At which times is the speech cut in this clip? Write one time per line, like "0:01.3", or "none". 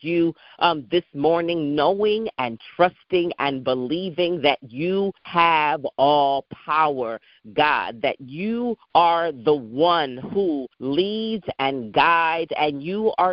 0:05.2
0:08.8
0:10.7